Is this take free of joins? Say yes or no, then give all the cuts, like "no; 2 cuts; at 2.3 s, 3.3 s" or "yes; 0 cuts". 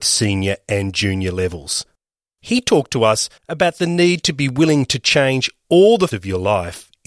no; 3 cuts; at 2.3 s, 3.4 s, 6.1 s